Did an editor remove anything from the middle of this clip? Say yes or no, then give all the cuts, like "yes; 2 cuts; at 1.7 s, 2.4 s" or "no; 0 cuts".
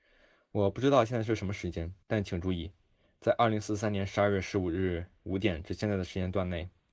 yes; 1 cut; at 2.0 s